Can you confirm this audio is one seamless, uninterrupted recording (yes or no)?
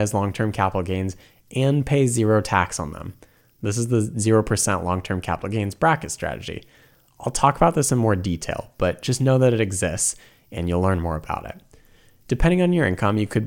yes